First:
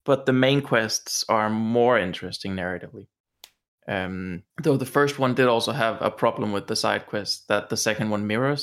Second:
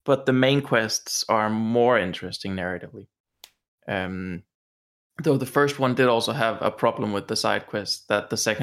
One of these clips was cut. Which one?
first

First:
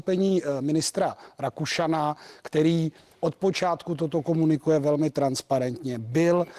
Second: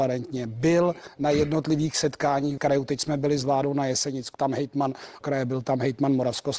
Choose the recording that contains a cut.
second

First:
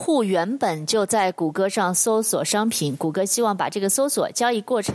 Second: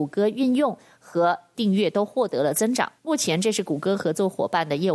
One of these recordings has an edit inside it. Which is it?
second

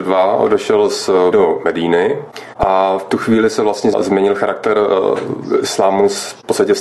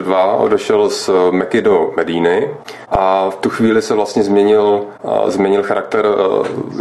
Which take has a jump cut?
first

